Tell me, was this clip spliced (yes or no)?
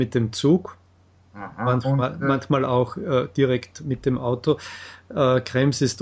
no